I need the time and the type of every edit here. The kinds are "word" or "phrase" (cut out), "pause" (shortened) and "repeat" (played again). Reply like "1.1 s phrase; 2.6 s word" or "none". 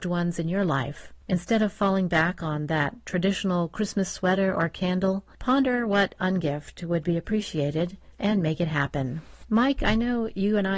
none

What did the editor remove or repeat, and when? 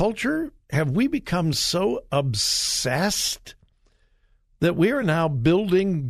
none

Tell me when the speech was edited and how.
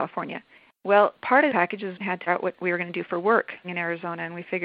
1.5 s phrase; 1.9 s word; 2.3 s word; 3.6 s word

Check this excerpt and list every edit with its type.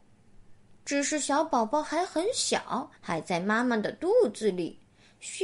3.0 s pause

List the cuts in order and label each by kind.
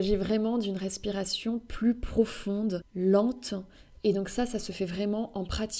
none

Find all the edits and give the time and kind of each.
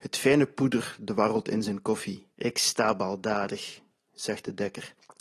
2.3 s pause

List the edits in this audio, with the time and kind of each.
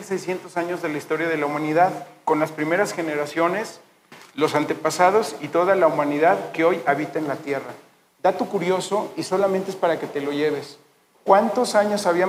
none

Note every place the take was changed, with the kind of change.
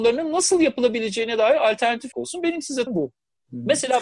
2.1 s word; 2.9 s word

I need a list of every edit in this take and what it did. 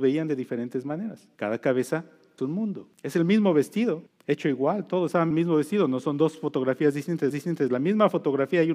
1.3 s pause; 2.4 s word; 2.9 s pause; 4.1 s pause; 5.3 s phrase; 7.3 s repeat

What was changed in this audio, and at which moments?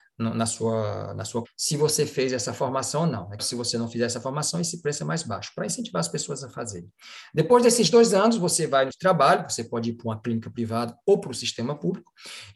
1.4 s phrase; 3.4 s word; 8.9 s phrase

